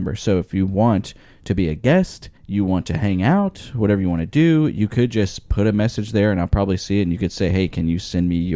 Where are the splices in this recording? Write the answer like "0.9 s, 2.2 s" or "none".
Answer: 2.4 s